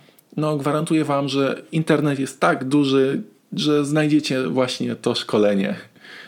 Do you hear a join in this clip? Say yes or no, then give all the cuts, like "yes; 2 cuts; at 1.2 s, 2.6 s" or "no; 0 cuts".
no; 0 cuts